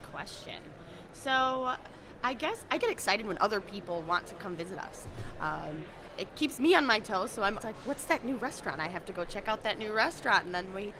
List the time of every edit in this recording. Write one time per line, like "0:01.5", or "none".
0:02.8
0:06.3
0:07.6